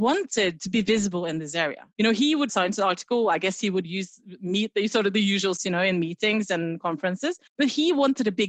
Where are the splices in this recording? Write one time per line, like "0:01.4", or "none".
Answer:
0:01.9
0:02.5
0:05.6
0:07.5

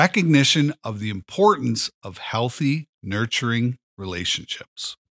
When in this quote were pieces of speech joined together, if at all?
0:02.9

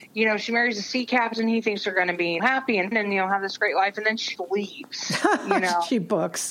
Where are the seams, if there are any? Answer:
0:02.4
0:02.9
0:04.4

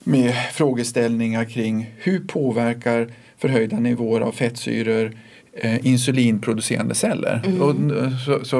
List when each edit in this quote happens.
none

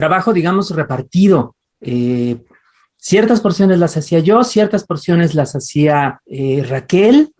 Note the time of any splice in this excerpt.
0:01.6
0:06.2

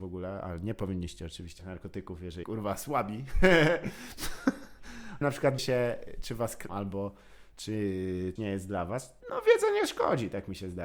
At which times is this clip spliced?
0:01.6
0:02.4
0:05.2
0:05.6
0:06.7
0:08.4
0:09.2

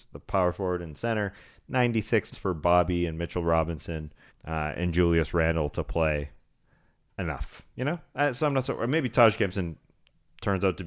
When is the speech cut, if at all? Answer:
0:02.3
0:04.3

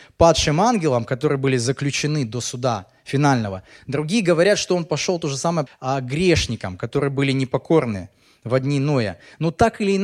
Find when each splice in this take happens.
0:05.7

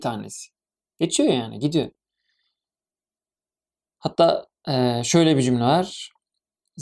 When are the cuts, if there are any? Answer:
none

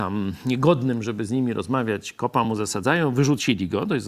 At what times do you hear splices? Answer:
none

